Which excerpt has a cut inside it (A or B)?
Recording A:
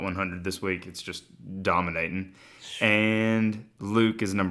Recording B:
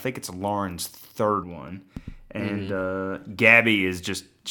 B